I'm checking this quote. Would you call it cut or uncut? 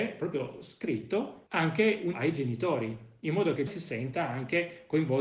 cut